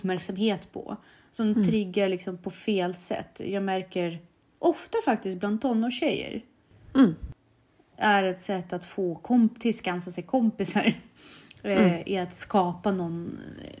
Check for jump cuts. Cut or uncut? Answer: uncut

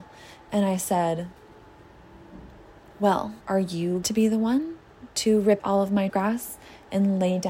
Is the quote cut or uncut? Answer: cut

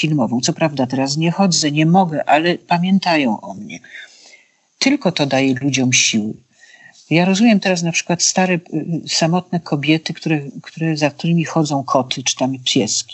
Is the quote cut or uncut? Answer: uncut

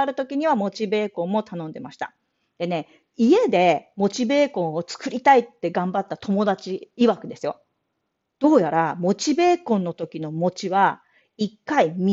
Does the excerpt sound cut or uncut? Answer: uncut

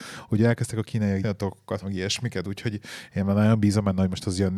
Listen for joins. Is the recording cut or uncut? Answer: cut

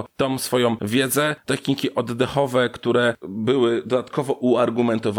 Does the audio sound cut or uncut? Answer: cut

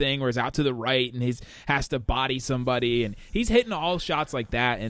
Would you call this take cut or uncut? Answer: uncut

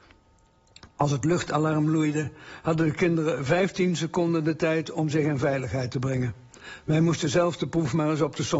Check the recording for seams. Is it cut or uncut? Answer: uncut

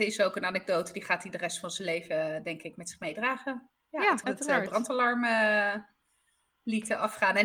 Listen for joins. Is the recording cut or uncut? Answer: cut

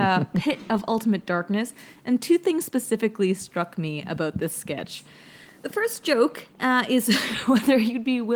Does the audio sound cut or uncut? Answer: uncut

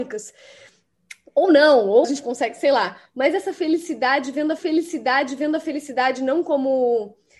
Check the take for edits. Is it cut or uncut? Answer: cut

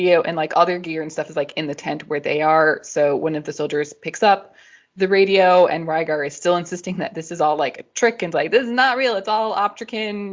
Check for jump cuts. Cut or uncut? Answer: uncut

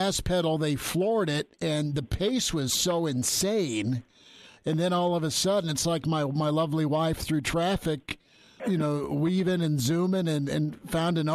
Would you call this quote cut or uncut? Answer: cut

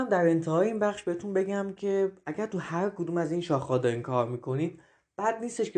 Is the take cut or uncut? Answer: uncut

